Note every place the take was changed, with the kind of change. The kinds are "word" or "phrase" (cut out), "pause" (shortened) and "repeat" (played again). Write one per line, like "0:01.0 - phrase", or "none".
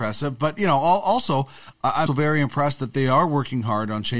0:02.1 - word